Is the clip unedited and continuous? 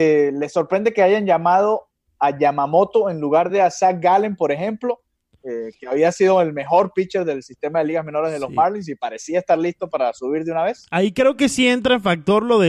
yes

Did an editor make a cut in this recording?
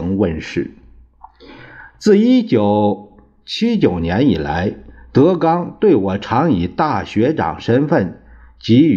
no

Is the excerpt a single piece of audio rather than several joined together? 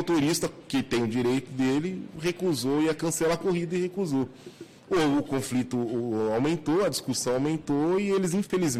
yes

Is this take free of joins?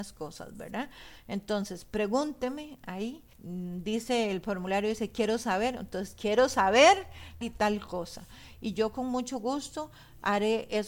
no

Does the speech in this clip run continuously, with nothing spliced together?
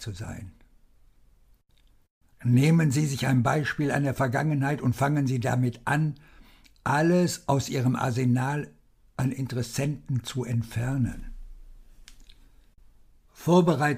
yes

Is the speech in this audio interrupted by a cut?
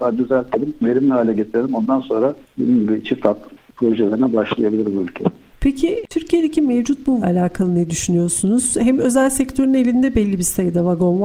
yes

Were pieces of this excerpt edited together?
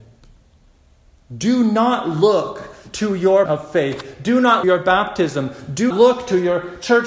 yes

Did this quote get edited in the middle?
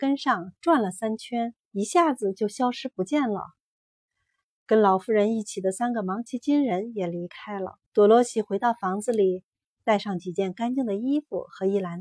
yes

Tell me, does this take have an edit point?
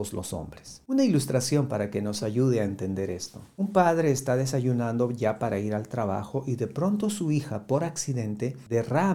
no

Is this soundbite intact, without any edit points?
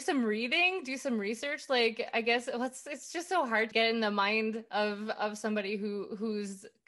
no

